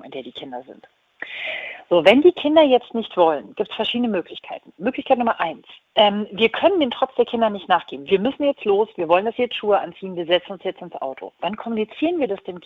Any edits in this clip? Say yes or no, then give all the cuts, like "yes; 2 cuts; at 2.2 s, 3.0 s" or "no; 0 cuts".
yes; 1 cut; at 5.8 s